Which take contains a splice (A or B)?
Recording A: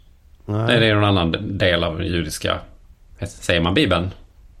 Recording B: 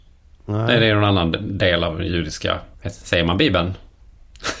B